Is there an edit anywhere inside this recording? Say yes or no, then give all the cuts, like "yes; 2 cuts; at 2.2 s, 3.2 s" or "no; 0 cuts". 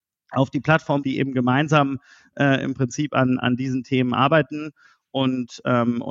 yes; 1 cut; at 1.0 s